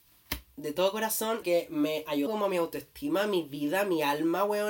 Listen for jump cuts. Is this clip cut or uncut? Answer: cut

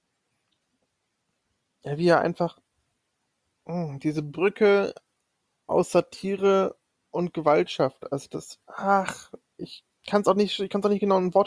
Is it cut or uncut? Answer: uncut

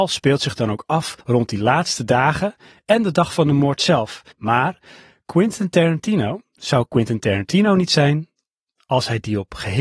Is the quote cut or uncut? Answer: cut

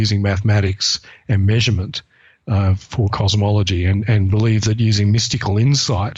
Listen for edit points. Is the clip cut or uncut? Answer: uncut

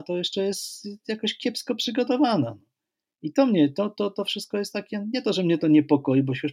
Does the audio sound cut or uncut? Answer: uncut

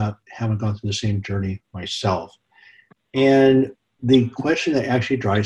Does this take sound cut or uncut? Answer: uncut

